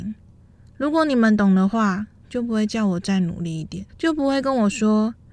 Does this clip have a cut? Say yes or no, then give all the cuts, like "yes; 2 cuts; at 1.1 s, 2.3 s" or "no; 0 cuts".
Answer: yes; 1 cut; at 3.9 s